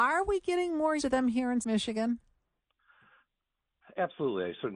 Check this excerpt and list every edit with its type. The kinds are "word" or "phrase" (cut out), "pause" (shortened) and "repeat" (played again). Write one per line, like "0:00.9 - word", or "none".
0:01.0 - word
0:01.6 - word

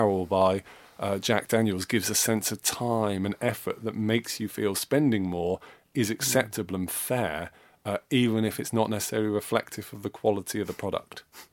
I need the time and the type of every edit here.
none

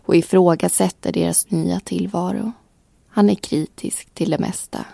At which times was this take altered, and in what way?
none

